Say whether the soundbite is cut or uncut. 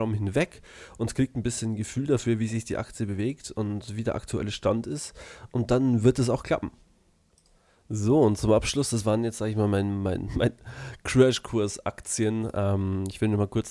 uncut